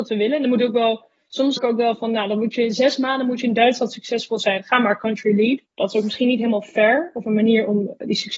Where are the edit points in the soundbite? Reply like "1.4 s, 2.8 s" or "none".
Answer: 1.6 s, 5.6 s